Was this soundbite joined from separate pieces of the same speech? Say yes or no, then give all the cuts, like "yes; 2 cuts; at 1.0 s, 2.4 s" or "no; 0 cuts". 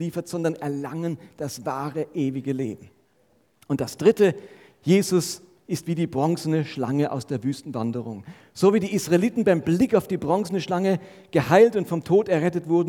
no; 0 cuts